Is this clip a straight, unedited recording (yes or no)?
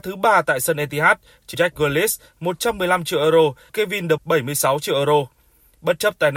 no